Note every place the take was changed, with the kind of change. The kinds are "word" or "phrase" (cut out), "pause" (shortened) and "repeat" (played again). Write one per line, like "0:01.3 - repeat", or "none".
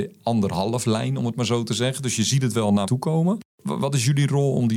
0:02.8 - word